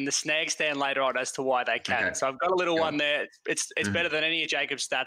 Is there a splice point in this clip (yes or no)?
no